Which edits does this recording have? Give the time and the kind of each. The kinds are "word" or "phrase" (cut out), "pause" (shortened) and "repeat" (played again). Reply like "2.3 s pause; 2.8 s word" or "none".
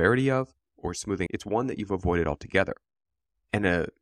1.3 s word